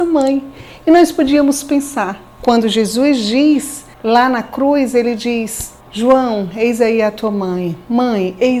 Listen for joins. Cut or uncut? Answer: cut